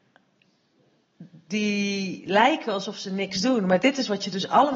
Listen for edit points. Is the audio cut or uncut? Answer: uncut